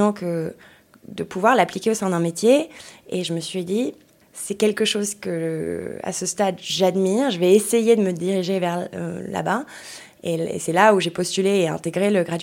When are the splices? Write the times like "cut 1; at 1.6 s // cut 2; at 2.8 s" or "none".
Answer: none